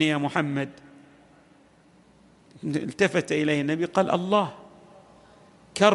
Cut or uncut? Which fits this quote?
uncut